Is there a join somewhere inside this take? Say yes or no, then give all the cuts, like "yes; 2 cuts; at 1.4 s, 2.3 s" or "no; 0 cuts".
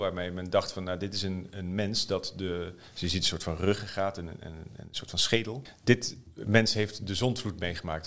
no; 0 cuts